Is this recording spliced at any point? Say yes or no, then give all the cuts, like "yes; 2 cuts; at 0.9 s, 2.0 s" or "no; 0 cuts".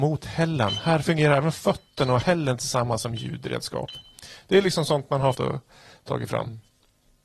yes; 1 cut; at 5.3 s